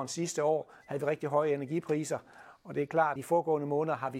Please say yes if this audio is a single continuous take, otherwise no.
no